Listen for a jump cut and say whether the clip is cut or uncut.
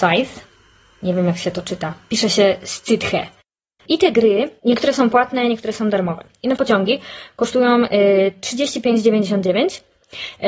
cut